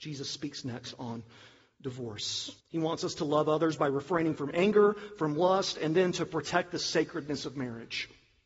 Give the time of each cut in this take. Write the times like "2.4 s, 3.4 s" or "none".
2.6 s